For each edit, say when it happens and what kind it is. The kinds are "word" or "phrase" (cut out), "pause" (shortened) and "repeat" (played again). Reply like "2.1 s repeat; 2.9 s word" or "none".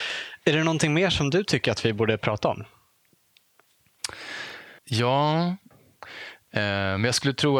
4.8 s pause